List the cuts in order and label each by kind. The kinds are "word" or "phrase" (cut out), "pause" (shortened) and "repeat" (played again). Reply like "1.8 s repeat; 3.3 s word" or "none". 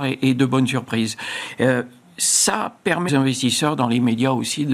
3.1 s word